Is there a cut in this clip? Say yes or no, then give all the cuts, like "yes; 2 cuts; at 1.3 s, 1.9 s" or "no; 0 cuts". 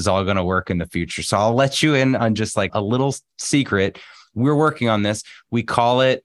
yes; 1 cut; at 2.7 s